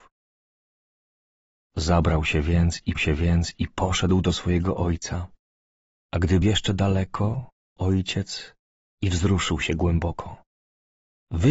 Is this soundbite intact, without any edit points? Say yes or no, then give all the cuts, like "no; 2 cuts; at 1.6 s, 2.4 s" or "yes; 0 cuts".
no; 3 cuts; at 3.0 s, 6.4 s, 7.8 s